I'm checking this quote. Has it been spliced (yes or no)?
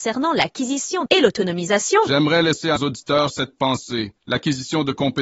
yes